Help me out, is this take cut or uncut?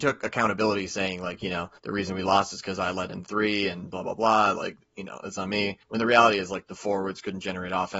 cut